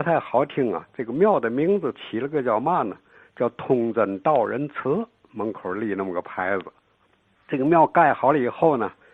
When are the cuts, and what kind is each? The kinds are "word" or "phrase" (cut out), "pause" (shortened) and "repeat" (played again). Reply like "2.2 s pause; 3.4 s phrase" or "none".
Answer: none